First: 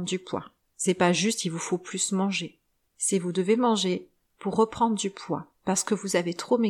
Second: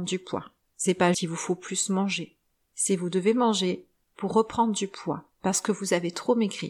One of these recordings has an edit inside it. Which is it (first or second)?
second